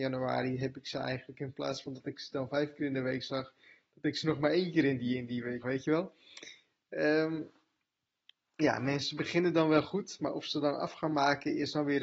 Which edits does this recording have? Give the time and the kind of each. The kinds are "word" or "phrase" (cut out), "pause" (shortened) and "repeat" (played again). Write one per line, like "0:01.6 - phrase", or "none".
0:05.6 - word

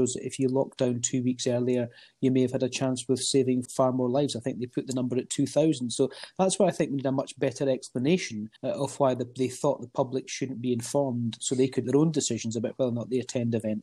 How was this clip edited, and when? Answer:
0:03.7 - word
0:08.6 - pause
0:11.8 - word

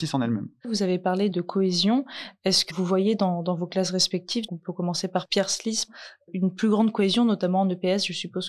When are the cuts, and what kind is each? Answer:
0:01.3 - word
0:02.7 - word
0:04.5 - word

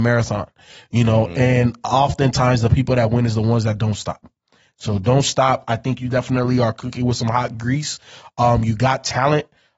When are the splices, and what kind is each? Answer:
none

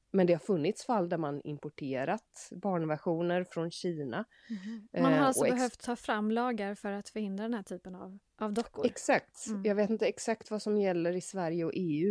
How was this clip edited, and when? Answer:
0:08.3 - pause

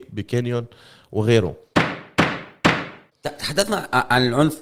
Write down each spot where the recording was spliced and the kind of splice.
none

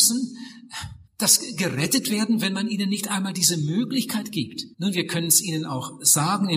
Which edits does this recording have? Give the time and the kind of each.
0:01.1 - pause
0:04.7 - pause

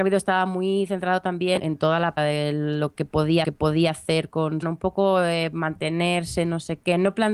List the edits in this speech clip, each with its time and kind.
0:01.6 - word
0:02.2 - phrase
0:03.4 - repeat
0:04.6 - phrase

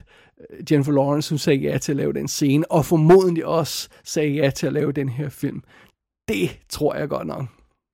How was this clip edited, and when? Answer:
none

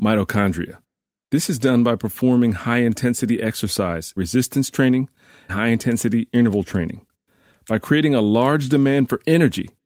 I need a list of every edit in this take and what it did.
0:04.2 - word
0:05.5 - word

